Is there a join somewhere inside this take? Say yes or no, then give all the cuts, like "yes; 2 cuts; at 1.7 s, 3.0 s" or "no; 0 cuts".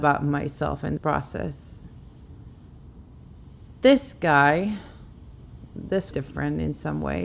yes; 2 cuts; at 1.0 s, 6.1 s